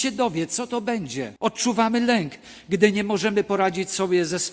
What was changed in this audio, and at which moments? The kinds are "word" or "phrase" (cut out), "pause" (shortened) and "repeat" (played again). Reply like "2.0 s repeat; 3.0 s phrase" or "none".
1.4 s pause